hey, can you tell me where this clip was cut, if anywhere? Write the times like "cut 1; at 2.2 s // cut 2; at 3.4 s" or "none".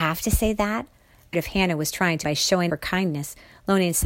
cut 1; at 1.3 s // cut 2; at 2.2 s // cut 3; at 2.7 s